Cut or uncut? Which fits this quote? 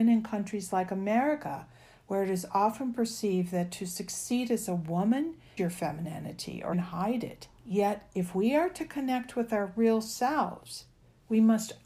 cut